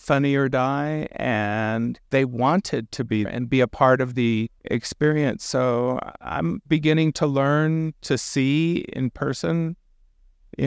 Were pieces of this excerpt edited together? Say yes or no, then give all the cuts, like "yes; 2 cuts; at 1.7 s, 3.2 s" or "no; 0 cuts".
yes; 3 cuts; at 2.1 s, 3.2 s, 4.6 s